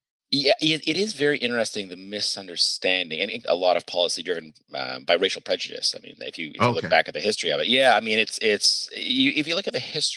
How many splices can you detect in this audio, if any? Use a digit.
1